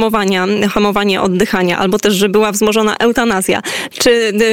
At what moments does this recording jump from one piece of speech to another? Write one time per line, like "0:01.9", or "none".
none